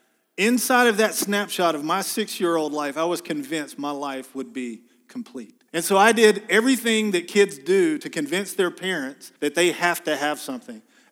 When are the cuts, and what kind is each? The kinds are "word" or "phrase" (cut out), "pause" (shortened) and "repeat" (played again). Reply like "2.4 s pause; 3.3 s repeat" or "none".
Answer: 5.7 s pause; 9.4 s pause